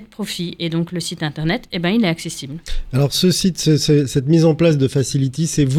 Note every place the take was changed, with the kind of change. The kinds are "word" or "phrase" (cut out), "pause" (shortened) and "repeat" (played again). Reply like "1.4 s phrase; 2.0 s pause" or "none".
none

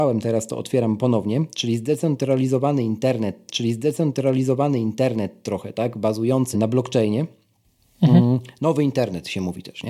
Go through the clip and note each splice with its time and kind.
3.5 s repeat; 6.5 s word

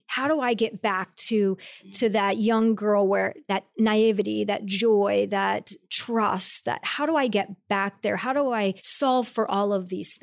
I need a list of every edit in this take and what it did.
8.8 s pause

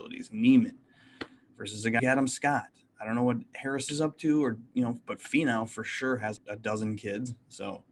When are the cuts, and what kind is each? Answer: 2.0 s word; 3.9 s word; 6.4 s word

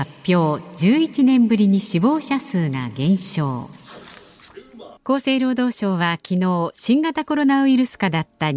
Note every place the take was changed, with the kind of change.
5.0 s pause

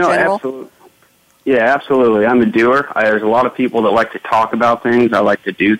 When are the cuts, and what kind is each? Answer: none

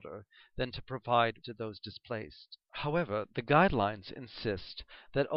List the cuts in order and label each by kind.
1.4 s phrase; 2.6 s pause

